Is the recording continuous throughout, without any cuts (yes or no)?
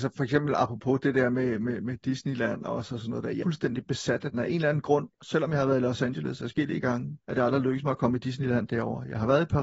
no